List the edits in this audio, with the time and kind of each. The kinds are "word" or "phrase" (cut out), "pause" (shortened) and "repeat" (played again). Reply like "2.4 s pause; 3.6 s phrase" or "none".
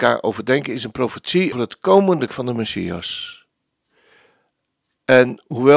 1.5 s word; 2.3 s word